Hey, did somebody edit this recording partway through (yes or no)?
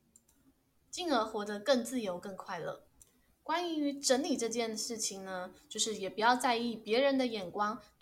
yes